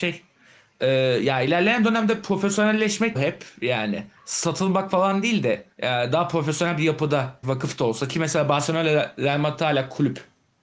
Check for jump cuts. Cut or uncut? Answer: cut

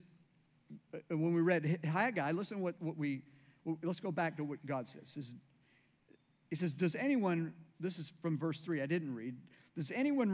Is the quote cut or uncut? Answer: uncut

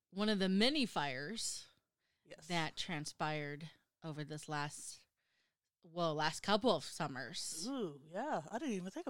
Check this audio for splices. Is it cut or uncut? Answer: uncut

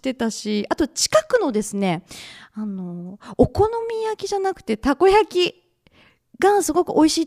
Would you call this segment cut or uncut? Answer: uncut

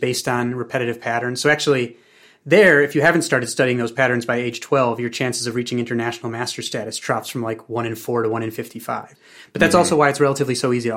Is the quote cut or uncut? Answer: uncut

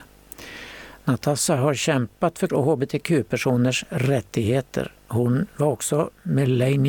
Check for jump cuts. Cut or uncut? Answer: cut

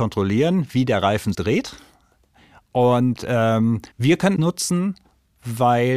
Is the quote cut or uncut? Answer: cut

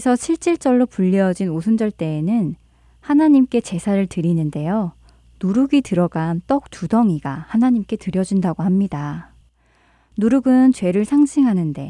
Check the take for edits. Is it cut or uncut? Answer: uncut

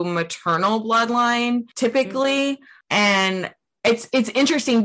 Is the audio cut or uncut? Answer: cut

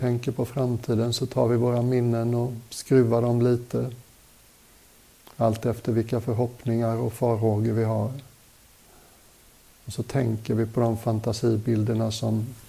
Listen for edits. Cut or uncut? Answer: uncut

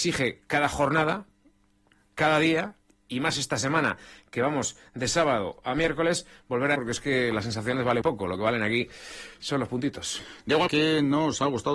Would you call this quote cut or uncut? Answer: cut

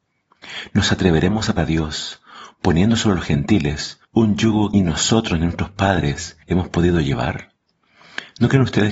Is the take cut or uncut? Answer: cut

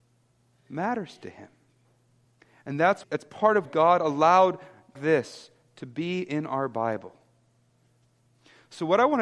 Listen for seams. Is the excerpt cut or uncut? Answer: cut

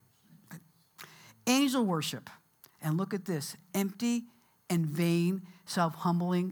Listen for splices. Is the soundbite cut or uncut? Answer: uncut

